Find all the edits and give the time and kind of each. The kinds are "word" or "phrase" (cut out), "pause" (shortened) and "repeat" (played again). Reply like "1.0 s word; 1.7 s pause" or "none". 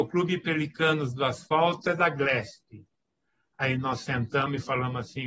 none